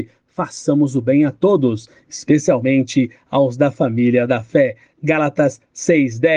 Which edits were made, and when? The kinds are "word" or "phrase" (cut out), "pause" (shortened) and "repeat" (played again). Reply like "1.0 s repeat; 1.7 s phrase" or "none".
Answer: none